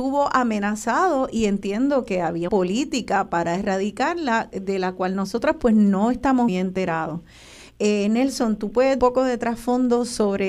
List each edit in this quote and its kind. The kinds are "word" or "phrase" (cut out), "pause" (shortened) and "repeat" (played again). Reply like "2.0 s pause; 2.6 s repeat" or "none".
2.5 s word; 6.5 s word; 9.0 s phrase